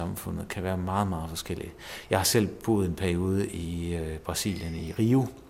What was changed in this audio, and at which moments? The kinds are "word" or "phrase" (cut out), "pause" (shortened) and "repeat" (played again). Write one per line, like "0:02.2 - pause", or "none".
none